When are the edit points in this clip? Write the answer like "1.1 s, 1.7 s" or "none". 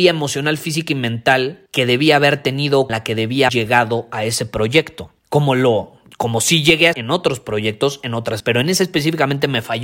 1.7 s, 2.9 s, 3.5 s, 5.2 s, 6.1 s, 6.9 s, 8.4 s